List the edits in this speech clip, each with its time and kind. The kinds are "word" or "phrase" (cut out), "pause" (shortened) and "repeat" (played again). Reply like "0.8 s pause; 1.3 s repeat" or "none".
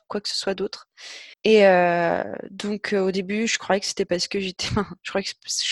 1.3 s pause